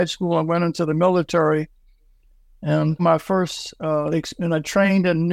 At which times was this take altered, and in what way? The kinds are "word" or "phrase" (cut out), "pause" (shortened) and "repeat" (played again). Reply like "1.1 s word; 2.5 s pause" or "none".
3.0 s word